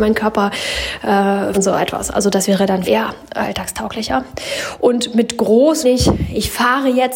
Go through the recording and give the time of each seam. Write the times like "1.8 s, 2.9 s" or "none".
1.5 s, 2.8 s, 5.8 s